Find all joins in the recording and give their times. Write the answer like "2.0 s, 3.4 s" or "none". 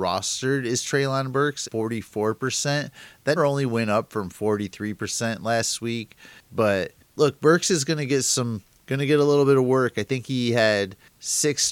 1.6 s, 3.4 s